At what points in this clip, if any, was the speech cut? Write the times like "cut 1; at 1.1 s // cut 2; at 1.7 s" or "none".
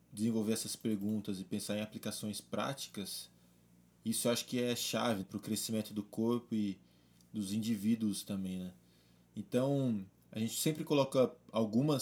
cut 1; at 5.2 s